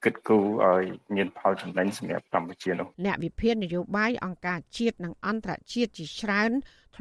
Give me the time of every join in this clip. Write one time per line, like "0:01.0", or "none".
0:02.9

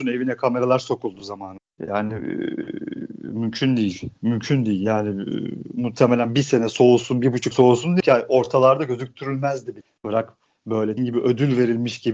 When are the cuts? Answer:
0:07.5
0:08.0
0:11.0

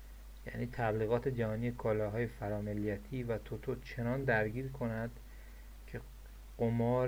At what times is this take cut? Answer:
none

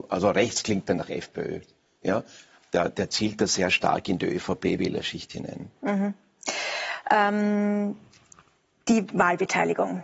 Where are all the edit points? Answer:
none

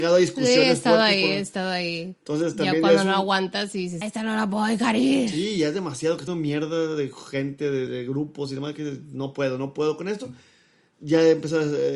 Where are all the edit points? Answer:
0:04.0
0:06.3
0:07.9

